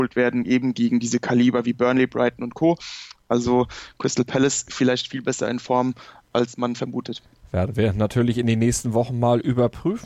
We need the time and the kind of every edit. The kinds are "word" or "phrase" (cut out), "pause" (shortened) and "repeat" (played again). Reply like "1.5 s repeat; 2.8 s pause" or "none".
none